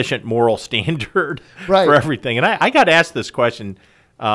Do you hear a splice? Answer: no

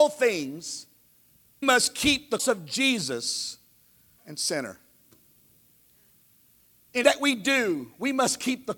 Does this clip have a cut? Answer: yes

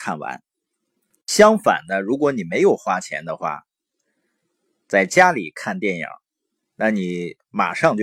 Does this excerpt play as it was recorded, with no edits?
yes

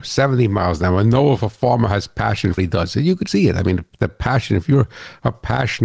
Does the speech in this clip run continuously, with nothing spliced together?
no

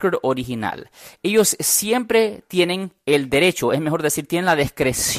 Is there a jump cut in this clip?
no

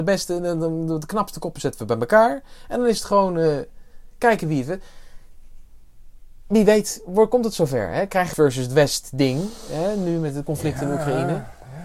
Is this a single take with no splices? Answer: no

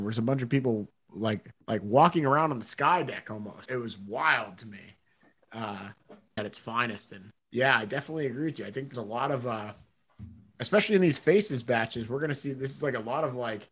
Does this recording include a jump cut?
yes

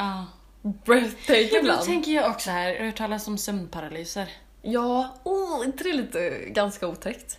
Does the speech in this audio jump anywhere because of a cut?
yes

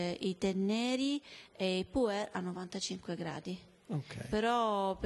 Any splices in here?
no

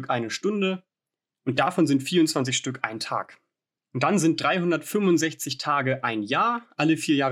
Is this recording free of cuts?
yes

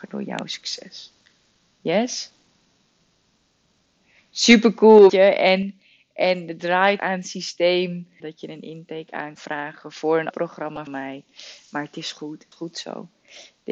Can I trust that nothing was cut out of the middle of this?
no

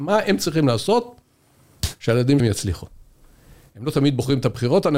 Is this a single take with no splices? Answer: no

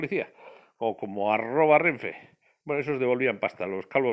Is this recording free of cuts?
yes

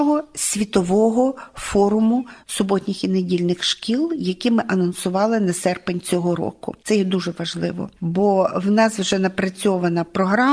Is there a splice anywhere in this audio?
yes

